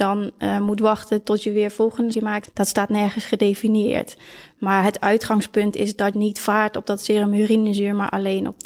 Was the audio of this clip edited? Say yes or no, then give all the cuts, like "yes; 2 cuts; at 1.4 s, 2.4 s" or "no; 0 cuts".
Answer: yes; 3 cuts; at 2.1 s, 2.4 s, 6.1 s